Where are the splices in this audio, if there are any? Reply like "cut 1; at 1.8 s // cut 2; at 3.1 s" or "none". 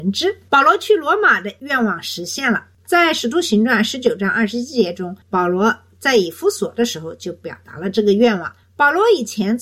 cut 1; at 5.2 s // cut 2; at 8.6 s